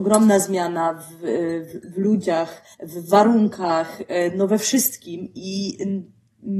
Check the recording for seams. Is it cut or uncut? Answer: cut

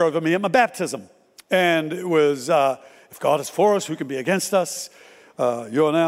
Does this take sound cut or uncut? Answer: uncut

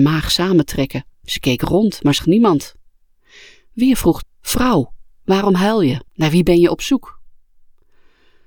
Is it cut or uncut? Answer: cut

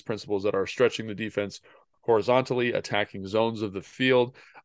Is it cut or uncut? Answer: uncut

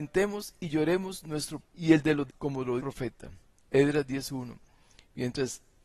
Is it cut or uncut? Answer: cut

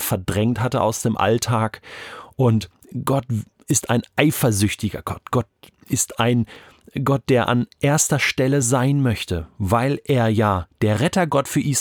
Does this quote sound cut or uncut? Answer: uncut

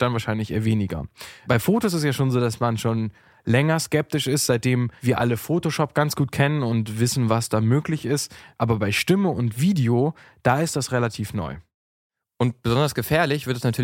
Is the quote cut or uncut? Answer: uncut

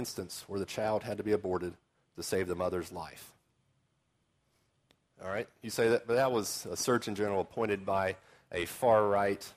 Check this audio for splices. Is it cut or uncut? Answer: uncut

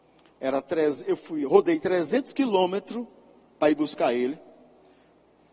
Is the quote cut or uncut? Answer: uncut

